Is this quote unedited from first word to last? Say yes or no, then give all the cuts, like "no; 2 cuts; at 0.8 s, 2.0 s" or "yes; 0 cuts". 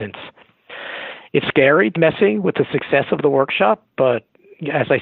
no; 2 cuts; at 1.4 s, 2.0 s